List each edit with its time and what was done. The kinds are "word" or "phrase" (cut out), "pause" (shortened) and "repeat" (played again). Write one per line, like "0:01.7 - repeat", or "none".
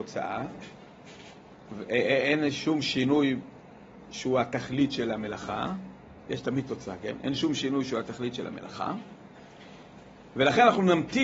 none